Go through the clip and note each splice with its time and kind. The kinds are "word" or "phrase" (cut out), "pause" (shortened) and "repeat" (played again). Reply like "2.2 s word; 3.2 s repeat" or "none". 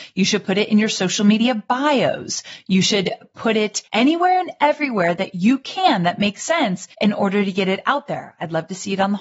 3.9 s pause; 6.9 s pause